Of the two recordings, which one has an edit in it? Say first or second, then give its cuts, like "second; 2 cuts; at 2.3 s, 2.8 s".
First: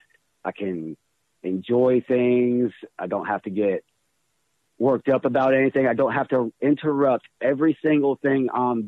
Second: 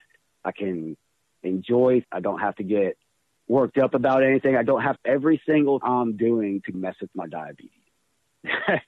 second; 5 cuts; at 2.0 s, 3.3 s, 5.0 s, 5.8 s, 6.7 s